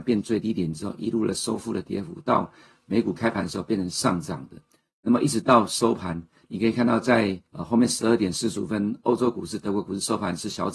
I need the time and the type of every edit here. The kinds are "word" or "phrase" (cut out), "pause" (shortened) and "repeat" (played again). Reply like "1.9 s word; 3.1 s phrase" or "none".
7.5 s pause